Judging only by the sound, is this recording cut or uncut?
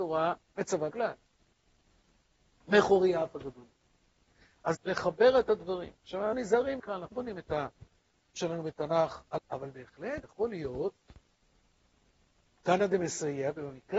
cut